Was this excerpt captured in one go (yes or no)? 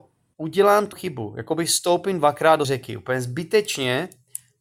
no